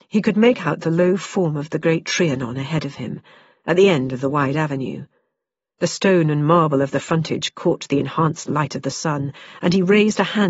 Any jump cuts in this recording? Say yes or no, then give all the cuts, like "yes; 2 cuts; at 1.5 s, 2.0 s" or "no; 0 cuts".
no; 0 cuts